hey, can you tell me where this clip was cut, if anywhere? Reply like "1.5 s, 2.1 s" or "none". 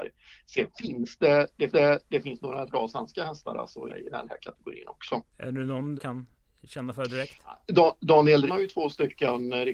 1.7 s, 2.7 s, 3.9 s, 5.3 s, 6.0 s, 8.5 s